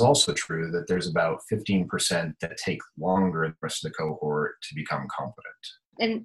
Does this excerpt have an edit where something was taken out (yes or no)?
no